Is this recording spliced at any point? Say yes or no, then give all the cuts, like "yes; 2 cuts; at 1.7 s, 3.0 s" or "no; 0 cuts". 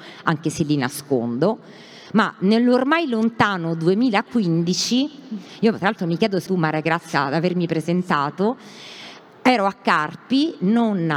yes; 1 cut; at 6.5 s